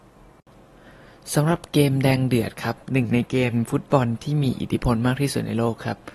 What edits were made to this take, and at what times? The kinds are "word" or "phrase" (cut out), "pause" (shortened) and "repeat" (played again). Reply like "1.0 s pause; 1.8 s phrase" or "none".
2.8 s pause